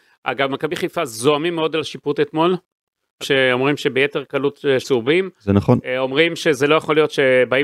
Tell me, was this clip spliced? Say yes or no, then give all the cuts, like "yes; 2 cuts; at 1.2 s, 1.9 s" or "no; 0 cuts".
yes; 2 cuts; at 3.2 s, 4.8 s